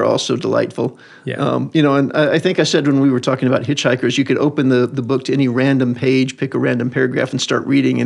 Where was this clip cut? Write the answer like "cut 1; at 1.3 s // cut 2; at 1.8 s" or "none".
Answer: none